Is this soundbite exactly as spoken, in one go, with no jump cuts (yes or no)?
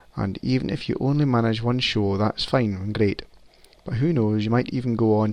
yes